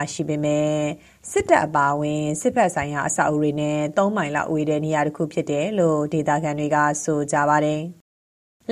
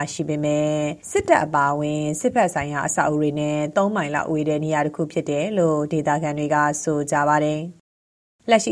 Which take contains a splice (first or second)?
second